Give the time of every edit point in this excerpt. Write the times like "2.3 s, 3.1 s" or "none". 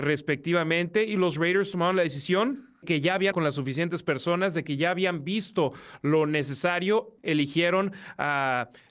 2.8 s, 3.3 s, 7.2 s